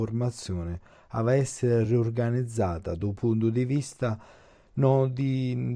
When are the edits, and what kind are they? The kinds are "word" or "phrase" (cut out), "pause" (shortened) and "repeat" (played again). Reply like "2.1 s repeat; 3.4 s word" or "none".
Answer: none